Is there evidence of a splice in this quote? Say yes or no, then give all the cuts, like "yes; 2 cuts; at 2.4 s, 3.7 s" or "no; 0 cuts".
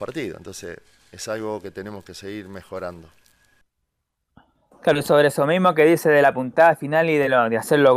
no; 0 cuts